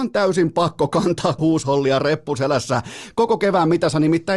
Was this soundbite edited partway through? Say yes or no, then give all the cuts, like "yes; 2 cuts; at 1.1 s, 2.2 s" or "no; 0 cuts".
yes; 1 cut; at 1.4 s